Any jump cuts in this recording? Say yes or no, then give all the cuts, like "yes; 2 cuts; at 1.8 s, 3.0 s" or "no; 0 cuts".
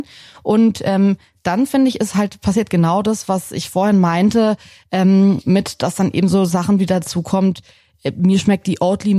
no; 0 cuts